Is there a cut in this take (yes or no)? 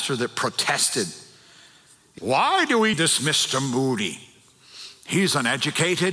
yes